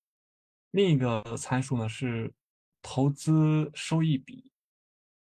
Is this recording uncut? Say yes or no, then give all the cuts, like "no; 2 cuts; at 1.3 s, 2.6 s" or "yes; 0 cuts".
no; 1 cut; at 2.5 s